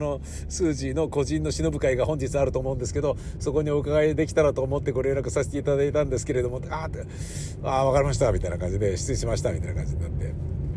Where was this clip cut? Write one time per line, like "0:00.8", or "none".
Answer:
none